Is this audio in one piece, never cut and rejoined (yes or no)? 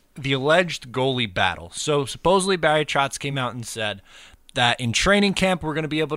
yes